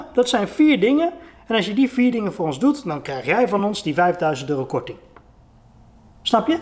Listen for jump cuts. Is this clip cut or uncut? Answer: uncut